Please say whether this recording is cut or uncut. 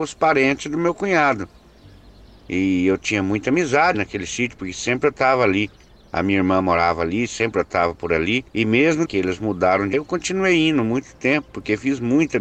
cut